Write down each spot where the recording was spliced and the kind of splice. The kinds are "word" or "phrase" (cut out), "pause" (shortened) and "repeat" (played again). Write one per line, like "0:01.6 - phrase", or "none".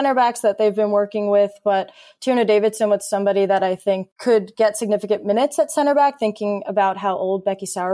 none